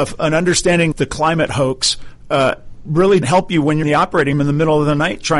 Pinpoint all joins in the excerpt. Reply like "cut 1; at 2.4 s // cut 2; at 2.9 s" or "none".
cut 1; at 0.9 s // cut 2; at 3.2 s // cut 3; at 3.8 s // cut 4; at 4.3 s